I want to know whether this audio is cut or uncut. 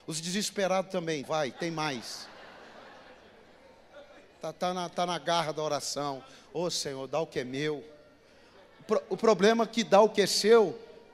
cut